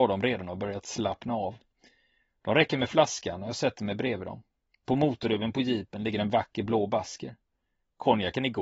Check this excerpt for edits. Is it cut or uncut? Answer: uncut